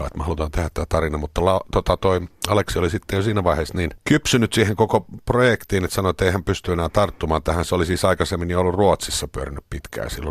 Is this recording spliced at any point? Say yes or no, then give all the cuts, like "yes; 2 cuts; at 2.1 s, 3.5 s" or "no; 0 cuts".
no; 0 cuts